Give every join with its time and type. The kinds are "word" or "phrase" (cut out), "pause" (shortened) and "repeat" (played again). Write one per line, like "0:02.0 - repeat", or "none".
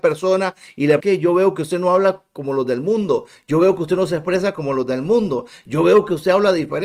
0:01.0 - phrase